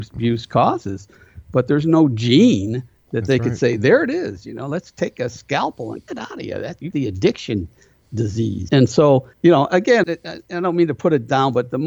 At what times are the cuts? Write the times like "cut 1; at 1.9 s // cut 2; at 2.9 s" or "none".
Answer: cut 1; at 6.1 s // cut 2; at 6.9 s // cut 3; at 8.7 s // cut 4; at 9.3 s // cut 5; at 10.0 s